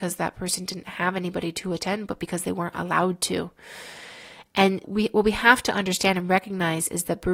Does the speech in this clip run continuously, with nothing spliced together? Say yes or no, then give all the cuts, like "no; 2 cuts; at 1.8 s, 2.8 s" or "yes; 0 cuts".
no; 1 cut; at 4.8 s